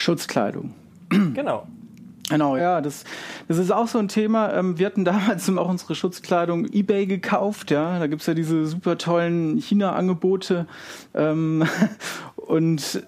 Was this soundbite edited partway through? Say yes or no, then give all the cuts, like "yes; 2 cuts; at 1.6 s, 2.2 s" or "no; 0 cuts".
yes; 3 cuts; at 2.6 s, 5.6 s, 6.6 s